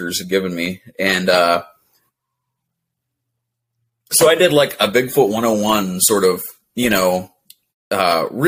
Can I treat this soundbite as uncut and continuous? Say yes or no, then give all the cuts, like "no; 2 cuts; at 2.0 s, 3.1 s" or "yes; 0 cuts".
yes; 0 cuts